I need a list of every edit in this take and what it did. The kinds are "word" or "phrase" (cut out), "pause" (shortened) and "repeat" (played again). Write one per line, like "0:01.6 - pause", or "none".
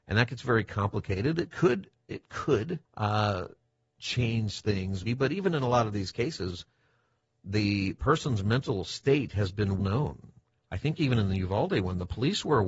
0:02.9 - pause
0:05.0 - word
0:09.8 - word